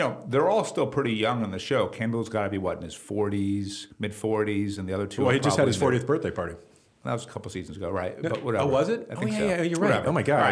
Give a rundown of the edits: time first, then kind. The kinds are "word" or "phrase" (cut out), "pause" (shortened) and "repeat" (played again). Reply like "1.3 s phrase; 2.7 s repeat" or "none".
3.9 s pause